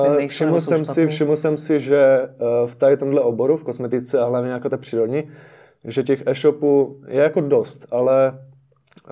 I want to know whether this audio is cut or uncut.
uncut